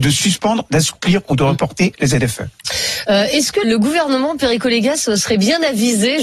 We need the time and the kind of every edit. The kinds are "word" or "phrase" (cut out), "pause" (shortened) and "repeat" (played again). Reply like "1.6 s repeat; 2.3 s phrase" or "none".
3.6 s word